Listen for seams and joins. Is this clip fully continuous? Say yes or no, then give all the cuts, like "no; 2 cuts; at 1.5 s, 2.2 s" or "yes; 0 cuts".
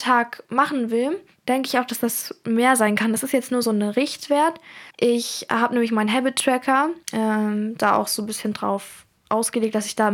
no; 2 cuts; at 4.9 s, 7.0 s